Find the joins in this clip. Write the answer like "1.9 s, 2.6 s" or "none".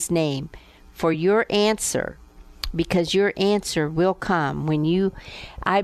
none